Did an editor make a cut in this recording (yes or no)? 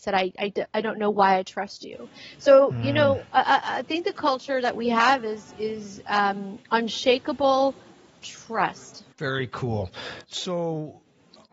yes